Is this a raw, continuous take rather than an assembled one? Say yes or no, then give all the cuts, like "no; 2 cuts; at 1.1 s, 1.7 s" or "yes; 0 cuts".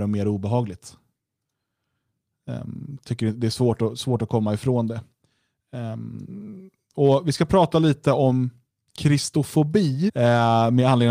no; 1 cut; at 10.1 s